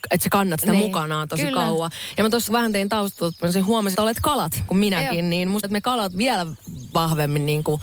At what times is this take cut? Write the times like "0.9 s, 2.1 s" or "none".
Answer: 2.5 s, 3.9 s, 4.7 s, 5.6 s